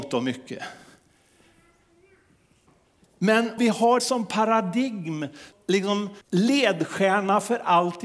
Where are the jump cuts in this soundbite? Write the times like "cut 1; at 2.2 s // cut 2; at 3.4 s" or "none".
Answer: cut 1; at 3.6 s // cut 2; at 4.0 s // cut 3; at 5.5 s // cut 4; at 6.2 s